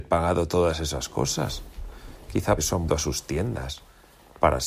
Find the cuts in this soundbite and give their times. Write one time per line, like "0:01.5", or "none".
0:02.6
0:02.9